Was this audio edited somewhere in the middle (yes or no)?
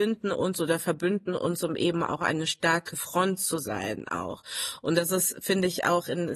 no